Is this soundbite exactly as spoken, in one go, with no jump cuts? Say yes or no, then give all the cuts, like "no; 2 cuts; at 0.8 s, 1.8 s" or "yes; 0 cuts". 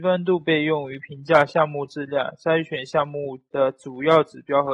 no; 1 cut; at 3.5 s